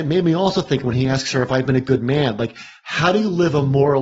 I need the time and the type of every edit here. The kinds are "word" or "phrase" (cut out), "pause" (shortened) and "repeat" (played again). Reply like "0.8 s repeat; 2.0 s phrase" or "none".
none